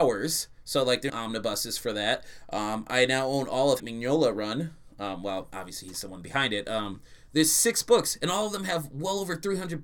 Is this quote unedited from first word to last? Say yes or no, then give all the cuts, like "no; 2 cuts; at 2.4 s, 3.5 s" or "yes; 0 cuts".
no; 2 cuts; at 1.1 s, 3.8 s